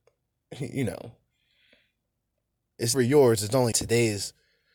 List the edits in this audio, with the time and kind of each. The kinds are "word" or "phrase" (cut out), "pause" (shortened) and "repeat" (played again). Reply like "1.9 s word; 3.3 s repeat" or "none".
2.9 s word; 3.7 s phrase

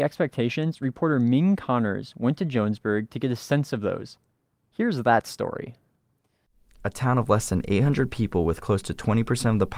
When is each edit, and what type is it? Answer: none

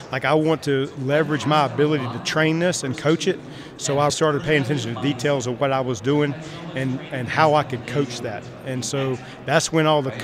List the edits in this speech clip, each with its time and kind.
4.1 s word

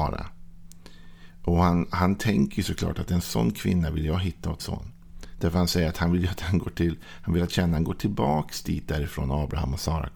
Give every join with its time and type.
4.6 s word

